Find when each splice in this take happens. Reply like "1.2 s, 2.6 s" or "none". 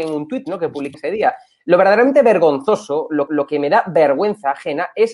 0.9 s, 3.3 s